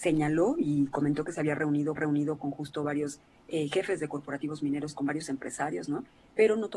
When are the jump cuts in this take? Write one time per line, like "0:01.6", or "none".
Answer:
0:02.0